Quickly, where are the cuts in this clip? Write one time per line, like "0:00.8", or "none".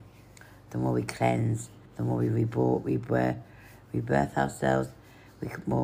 0:01.9

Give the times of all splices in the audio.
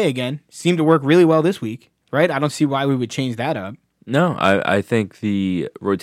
0:02.0
0:03.9

